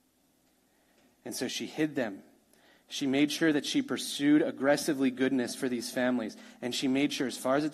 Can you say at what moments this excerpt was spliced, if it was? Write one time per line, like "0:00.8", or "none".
none